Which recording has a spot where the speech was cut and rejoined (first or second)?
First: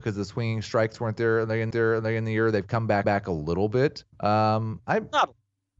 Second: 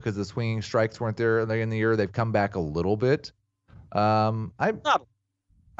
first